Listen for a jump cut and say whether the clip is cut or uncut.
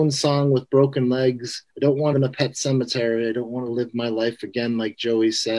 cut